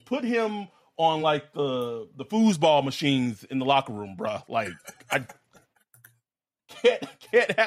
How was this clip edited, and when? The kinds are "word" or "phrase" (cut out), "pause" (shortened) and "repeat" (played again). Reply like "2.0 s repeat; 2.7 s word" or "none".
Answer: none